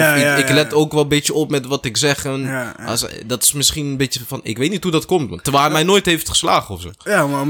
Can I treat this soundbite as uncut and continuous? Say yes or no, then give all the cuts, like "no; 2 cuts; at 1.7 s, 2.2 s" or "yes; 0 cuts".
yes; 0 cuts